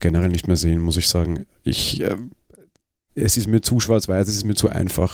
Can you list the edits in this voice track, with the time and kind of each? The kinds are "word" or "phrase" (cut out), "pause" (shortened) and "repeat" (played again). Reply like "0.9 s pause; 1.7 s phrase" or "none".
none